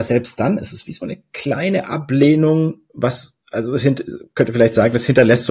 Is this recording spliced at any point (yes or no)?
no